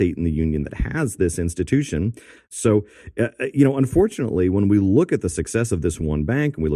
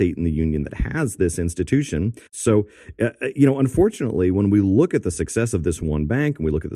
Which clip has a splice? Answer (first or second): second